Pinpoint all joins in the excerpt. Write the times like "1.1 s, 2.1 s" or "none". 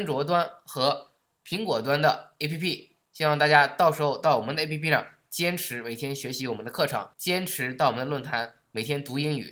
7.1 s